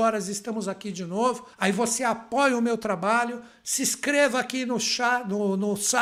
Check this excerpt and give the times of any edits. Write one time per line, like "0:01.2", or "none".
0:01.5